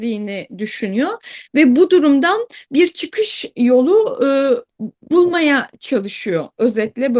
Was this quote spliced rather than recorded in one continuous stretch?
yes; 1 cut; at 4.7 s

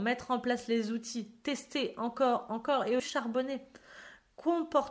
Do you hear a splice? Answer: yes; 2 cuts; at 2.5 s, 3.0 s

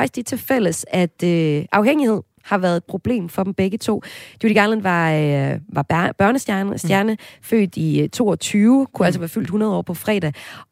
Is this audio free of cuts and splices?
yes; 0 cuts

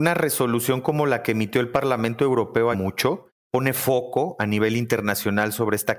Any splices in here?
yes; 1 cut; at 2.7 s

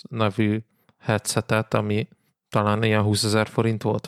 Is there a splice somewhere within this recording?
no; 0 cuts

